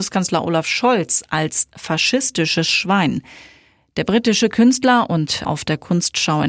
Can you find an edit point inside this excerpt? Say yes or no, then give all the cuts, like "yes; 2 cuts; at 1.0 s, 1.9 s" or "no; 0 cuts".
yes; 1 cut; at 5.4 s